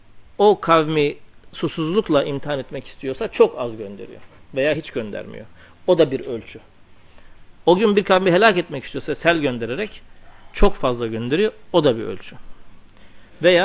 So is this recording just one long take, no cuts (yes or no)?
yes